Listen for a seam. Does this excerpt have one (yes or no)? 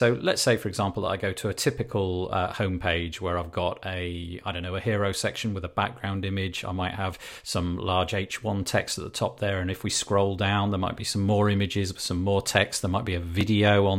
no